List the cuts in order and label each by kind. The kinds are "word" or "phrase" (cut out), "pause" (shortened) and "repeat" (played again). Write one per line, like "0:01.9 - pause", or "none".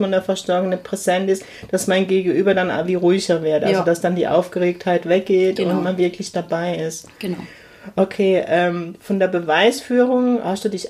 none